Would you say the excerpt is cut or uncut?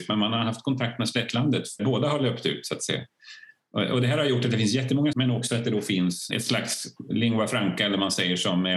cut